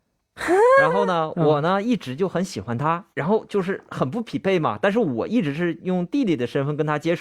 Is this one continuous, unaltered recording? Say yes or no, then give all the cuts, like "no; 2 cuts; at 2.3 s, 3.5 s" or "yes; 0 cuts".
no; 1 cut; at 3.1 s